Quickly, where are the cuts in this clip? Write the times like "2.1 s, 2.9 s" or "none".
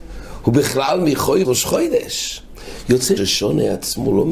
1.4 s, 3.2 s